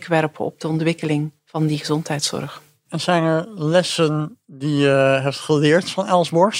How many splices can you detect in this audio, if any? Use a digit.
1